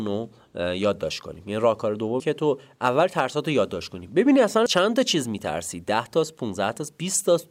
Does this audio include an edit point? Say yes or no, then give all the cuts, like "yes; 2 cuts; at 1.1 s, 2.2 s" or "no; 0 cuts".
yes; 2 cuts; at 2.2 s, 4.7 s